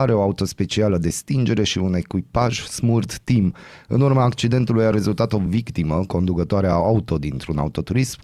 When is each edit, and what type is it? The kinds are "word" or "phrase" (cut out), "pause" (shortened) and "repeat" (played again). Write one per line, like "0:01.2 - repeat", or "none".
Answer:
none